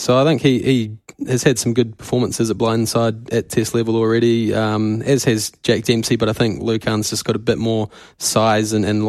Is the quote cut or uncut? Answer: uncut